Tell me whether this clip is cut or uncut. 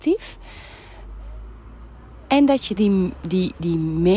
cut